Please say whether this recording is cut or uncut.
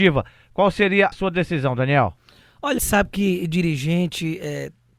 cut